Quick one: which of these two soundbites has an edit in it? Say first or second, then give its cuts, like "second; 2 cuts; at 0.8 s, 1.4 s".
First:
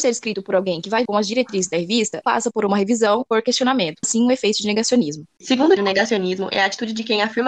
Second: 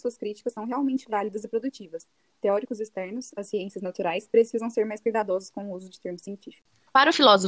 first; 5 cuts; at 1.1 s, 2.2 s, 3.3 s, 4.0 s, 5.8 s